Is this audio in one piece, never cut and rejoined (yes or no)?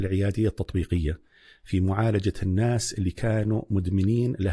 yes